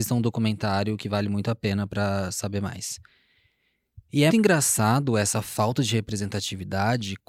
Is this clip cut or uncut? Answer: cut